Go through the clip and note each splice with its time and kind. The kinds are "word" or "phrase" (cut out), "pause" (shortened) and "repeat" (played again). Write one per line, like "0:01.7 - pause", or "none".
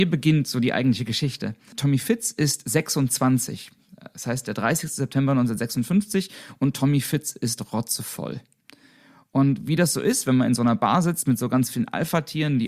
none